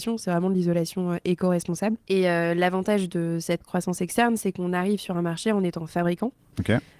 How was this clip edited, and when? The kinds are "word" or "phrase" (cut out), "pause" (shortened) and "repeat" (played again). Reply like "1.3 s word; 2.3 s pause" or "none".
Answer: 2.0 s pause